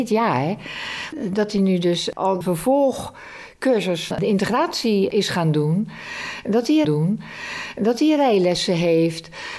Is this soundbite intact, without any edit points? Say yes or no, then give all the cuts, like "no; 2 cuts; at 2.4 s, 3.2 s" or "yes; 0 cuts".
no; 3 cuts; at 2.4 s, 4.1 s, 6.8 s